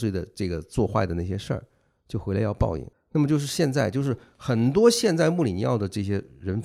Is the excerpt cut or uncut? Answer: cut